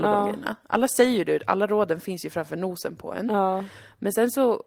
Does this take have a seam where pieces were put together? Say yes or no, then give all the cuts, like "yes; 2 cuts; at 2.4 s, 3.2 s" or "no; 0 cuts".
no; 0 cuts